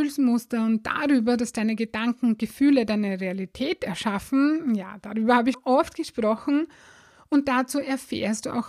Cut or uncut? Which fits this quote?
cut